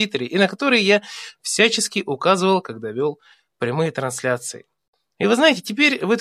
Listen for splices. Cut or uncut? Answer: uncut